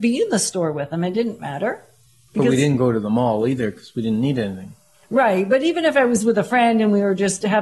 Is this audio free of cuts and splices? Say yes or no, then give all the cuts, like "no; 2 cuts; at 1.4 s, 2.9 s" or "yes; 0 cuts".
yes; 0 cuts